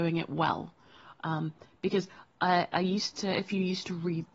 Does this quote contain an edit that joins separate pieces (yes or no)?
no